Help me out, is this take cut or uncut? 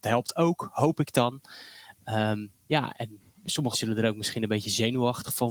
cut